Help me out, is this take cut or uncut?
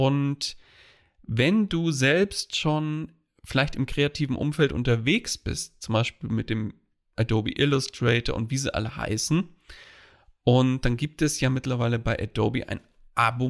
uncut